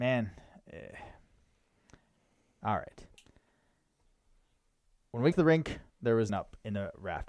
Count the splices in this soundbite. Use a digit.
3